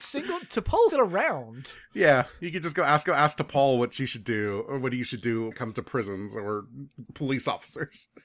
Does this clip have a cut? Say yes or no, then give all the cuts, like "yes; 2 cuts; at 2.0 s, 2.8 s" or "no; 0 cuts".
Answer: yes; 4 cuts; at 0.9 s, 3.1 s, 5.5 s, 7.1 s